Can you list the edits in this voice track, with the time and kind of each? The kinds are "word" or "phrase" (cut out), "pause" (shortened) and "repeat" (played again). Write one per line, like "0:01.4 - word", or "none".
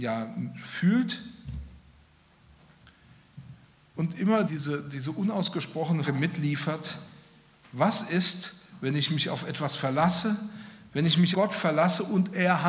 0:04.5 - word
0:06.1 - word
0:11.3 - word